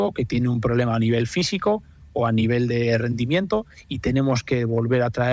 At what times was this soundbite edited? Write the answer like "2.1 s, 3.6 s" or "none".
none